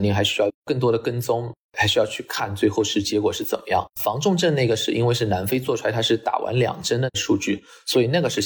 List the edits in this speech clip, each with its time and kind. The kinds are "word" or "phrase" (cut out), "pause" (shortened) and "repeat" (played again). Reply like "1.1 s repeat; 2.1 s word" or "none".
3.9 s pause

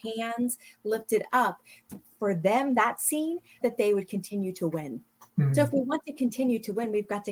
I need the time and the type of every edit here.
2.2 s word; 3.6 s word; 5.3 s pause

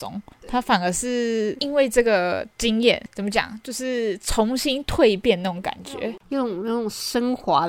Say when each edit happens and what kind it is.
none

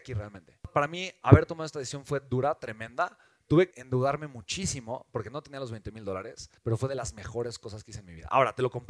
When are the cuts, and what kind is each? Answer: 3.7 s word; 6.6 s pause

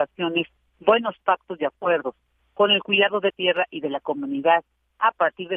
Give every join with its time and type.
3.3 s word

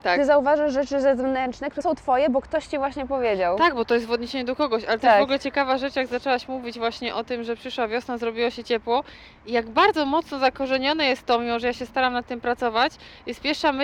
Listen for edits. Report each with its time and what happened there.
1.8 s word

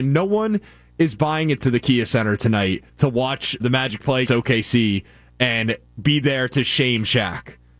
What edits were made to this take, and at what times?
1.6 s word; 2.9 s pause; 3.6 s word; 4.2 s word; 6.0 s word

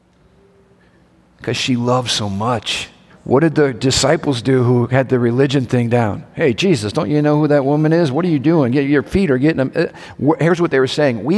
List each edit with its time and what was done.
3.1 s pause

